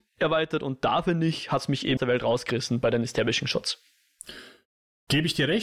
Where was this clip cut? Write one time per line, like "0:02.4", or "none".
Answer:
0:02.0